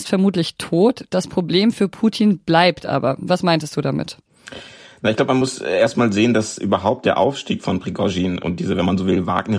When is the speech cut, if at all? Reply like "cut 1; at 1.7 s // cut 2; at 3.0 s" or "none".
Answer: none